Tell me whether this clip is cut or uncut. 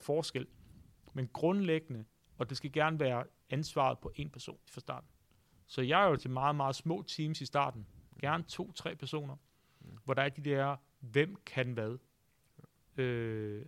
cut